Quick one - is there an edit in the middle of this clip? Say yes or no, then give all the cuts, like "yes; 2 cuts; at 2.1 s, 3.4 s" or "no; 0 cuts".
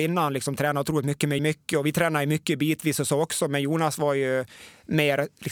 yes; 1 cut; at 1.4 s